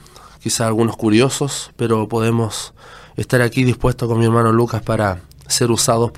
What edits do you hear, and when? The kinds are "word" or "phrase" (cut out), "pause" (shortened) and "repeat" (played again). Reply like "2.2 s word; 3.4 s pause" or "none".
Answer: none